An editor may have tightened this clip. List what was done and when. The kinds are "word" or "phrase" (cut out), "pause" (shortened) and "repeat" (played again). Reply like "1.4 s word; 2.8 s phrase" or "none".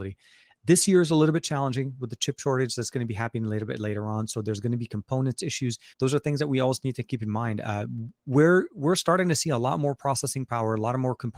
5.9 s pause